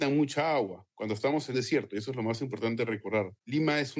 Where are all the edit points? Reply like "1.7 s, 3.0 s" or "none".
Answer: 1.5 s